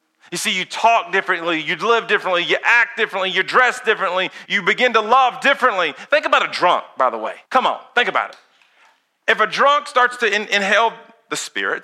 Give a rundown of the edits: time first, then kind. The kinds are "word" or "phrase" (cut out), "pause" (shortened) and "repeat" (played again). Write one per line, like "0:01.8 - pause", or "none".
0:04.5 - word
0:07.5 - pause